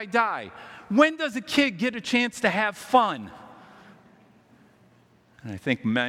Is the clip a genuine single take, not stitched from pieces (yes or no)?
yes